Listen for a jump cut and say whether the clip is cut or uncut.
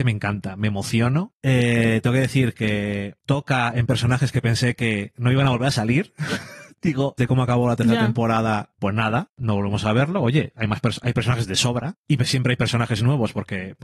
cut